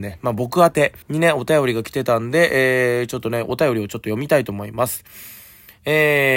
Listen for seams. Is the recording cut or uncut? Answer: cut